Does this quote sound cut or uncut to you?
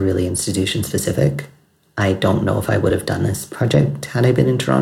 uncut